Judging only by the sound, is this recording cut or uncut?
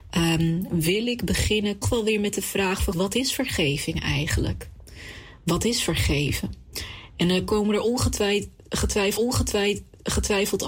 cut